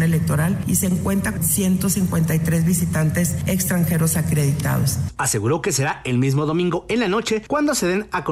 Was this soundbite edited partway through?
yes; 1 cut; at 1.4 s

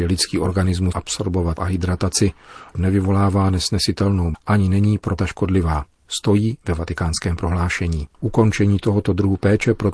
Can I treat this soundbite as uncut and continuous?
no; 6 cuts; at 0.9 s, 1.6 s, 2.7 s, 4.3 s, 5.2 s, 8.1 s

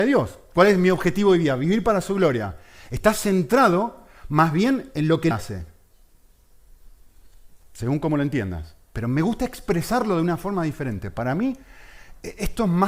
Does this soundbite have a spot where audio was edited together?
yes; 1 cut; at 5.3 s

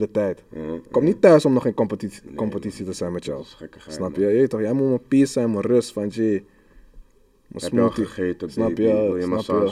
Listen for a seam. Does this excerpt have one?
no; 0 cuts

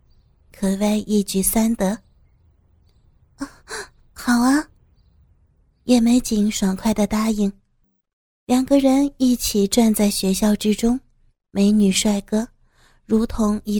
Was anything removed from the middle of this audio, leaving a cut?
no; 0 cuts

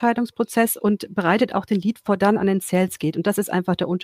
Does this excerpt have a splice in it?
yes; 1 cut; at 2.2 s

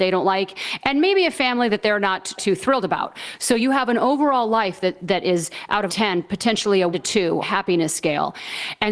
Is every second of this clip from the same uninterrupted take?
no; 4 cuts; at 2.4 s, 5.9 s, 6.9 s, 7.4 s

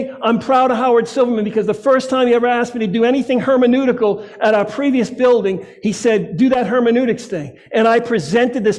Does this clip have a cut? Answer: no; 0 cuts

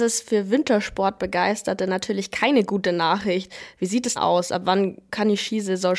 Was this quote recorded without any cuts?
no; 1 cut; at 4.2 s

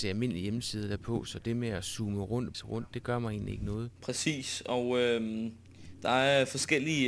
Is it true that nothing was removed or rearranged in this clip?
no; 1 cut; at 2.5 s

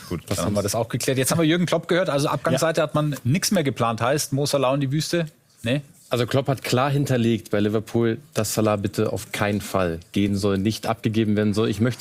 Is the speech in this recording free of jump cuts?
yes; 0 cuts

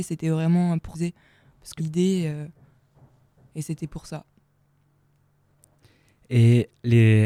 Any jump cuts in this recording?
yes; 2 cuts; at 0.9 s, 1.8 s

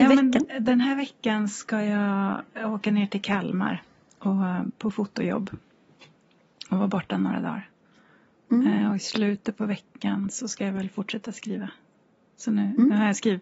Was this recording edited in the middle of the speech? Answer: no; 0 cuts

